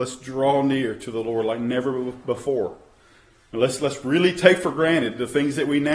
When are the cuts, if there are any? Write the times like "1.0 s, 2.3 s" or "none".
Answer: none

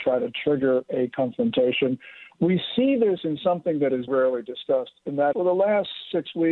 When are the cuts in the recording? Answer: 4.1 s, 5.3 s

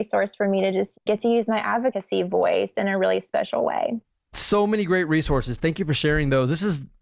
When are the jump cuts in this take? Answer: none

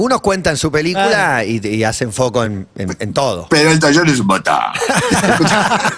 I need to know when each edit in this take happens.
none

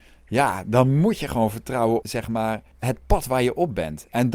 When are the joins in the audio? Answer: 2.0 s, 2.7 s

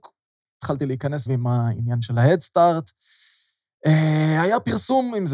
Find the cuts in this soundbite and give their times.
1.3 s

